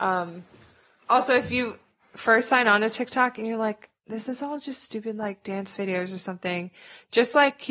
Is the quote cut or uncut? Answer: uncut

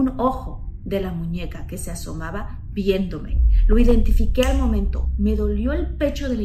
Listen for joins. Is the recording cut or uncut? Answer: uncut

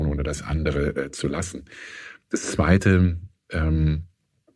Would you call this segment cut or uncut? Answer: uncut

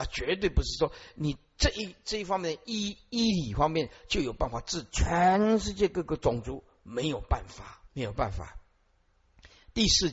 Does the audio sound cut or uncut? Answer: cut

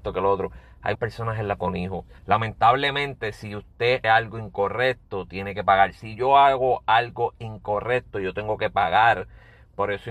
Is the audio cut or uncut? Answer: cut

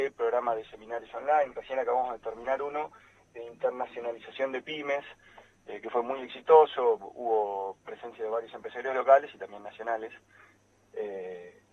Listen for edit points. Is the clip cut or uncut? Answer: uncut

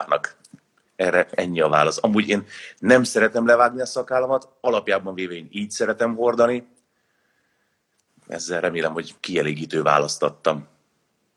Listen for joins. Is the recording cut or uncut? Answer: uncut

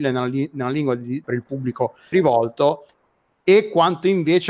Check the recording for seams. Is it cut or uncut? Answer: cut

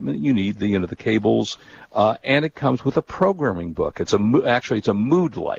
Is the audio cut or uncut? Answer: uncut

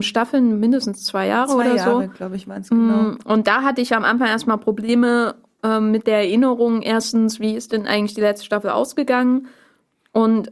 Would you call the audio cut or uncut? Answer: uncut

